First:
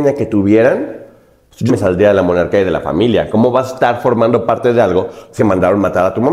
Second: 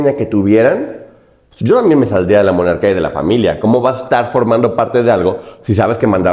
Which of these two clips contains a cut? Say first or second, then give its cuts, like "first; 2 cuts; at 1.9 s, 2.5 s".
first; 2 cuts; at 1.7 s, 5.4 s